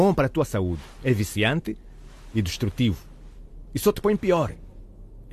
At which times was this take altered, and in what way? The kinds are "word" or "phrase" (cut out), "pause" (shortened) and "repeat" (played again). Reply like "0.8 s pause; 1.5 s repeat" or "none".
none